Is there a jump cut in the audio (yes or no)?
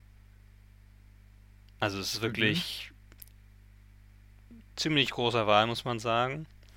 no